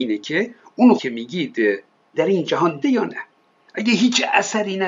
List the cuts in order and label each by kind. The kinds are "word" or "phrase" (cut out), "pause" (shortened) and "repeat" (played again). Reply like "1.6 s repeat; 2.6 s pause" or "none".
1.0 s word; 2.1 s word; 2.8 s word